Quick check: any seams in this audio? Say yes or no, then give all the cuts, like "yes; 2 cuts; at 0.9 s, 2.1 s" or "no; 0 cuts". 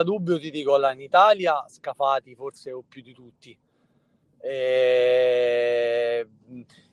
no; 0 cuts